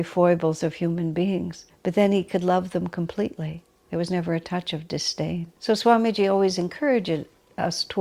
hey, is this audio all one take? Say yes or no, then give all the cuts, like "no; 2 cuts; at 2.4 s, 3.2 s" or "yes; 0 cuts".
no; 2 cuts; at 1.7 s, 5.6 s